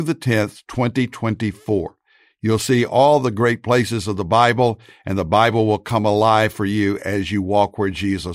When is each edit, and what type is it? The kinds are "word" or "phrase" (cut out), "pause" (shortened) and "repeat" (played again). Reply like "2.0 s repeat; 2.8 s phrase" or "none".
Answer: none